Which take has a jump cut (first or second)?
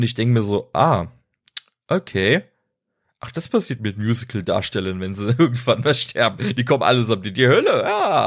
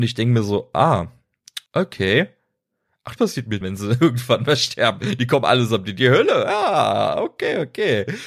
second